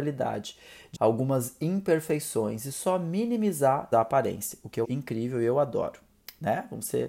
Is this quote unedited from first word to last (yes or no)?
no